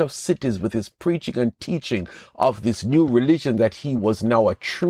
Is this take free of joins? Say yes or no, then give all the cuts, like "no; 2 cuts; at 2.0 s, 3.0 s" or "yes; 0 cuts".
yes; 0 cuts